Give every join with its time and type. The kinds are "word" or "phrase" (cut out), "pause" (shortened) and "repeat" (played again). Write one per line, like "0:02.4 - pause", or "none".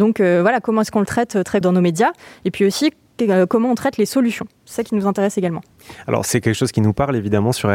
0:01.6 - word